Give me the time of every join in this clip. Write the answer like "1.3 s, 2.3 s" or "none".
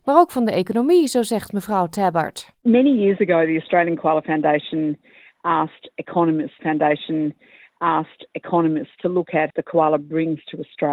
2.6 s, 6.6 s, 9.5 s